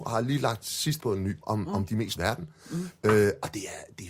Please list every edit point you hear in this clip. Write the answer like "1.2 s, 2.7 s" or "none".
1.0 s, 1.4 s, 2.2 s